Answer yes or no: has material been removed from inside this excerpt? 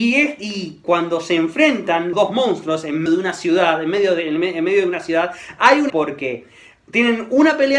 yes